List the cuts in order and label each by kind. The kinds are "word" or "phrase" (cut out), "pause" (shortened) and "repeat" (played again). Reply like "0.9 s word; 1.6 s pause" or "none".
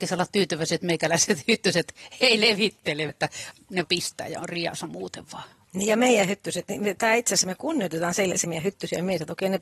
3.1 s word; 3.8 s word; 8.4 s word